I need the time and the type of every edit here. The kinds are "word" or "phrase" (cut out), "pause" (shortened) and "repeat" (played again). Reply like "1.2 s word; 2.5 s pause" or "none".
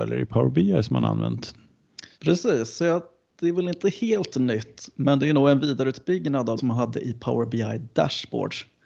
2.1 s pause; 6.6 s phrase